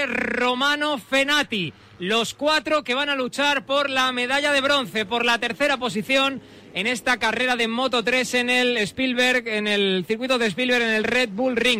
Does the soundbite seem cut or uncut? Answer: uncut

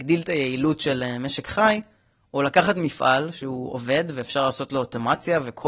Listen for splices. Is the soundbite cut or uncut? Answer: uncut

